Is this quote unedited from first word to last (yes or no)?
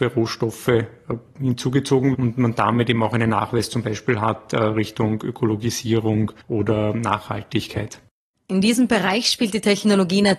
no